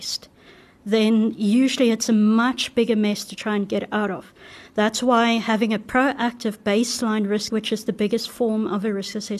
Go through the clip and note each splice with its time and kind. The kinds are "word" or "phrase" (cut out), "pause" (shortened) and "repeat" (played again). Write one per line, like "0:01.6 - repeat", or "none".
0:07.5 - word